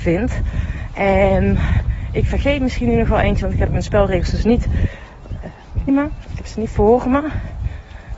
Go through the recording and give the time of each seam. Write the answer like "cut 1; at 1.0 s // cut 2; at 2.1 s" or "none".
cut 1; at 3.7 s // cut 2; at 5.9 s // cut 3; at 6.7 s